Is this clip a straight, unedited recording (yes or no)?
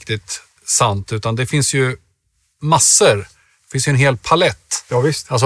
yes